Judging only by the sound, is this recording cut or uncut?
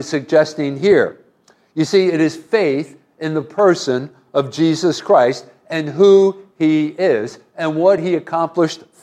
uncut